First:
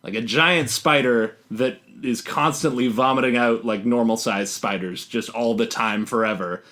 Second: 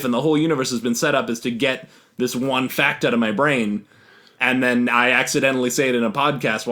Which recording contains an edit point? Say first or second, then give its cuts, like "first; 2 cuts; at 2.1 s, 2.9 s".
first; 1 cut; at 1.4 s